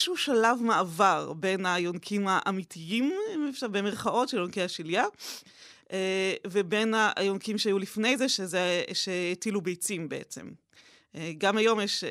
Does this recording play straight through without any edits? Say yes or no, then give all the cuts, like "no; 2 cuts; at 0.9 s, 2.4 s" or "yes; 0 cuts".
yes; 0 cuts